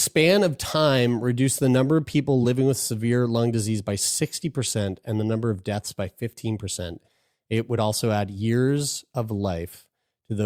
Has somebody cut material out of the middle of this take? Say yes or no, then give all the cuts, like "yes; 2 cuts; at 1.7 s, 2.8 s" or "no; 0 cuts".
no; 0 cuts